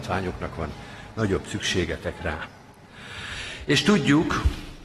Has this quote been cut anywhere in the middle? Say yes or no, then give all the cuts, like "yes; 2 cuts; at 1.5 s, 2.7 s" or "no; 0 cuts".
no; 0 cuts